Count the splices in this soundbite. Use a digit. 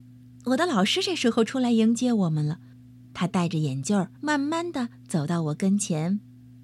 1